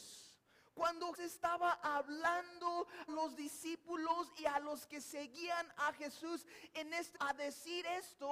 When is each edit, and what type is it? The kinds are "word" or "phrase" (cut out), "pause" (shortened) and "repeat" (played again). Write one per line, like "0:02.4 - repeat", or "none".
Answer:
0:01.1 - word
0:03.1 - word
0:07.1 - word